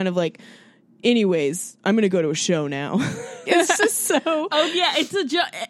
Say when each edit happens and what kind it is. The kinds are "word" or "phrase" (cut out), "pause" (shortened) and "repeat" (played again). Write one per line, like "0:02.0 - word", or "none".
0:03.5 - word

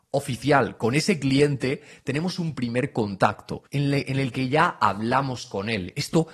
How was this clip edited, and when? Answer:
0:03.7 - pause

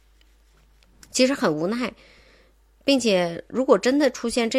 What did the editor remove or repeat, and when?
none

